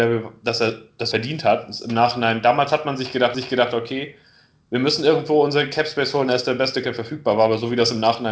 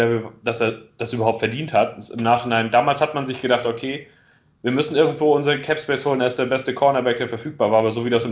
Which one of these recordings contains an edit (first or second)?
first